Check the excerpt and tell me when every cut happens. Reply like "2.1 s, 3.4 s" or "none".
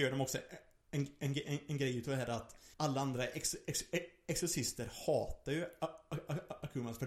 2.7 s